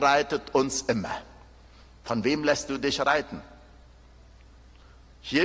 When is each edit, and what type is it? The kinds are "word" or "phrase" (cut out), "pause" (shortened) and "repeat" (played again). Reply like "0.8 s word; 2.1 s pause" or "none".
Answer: none